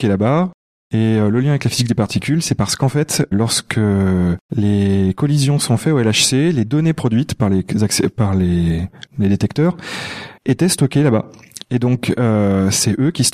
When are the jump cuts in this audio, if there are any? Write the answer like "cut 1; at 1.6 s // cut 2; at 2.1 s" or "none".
cut 1; at 3.3 s // cut 2; at 4.4 s // cut 3; at 9.1 s // cut 4; at 10.4 s